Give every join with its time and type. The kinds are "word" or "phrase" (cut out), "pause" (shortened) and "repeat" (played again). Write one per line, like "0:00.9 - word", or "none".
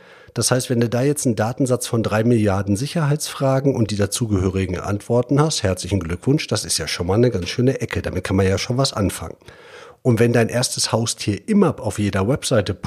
none